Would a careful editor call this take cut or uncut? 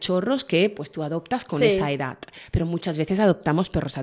uncut